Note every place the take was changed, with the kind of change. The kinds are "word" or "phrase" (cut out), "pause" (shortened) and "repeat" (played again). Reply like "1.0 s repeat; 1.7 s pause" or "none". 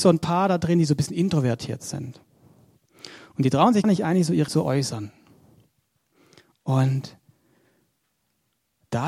3.8 s word; 4.5 s word